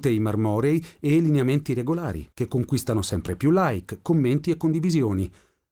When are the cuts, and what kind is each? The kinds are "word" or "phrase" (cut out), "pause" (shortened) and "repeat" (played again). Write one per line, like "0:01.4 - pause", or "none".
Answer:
0:02.3 - pause